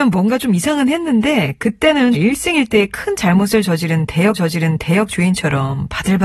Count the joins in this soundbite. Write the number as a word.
two